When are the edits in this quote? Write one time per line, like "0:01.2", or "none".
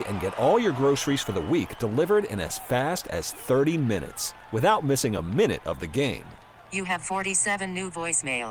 none